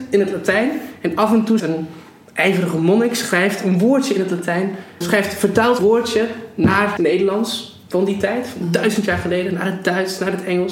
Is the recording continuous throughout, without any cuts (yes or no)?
no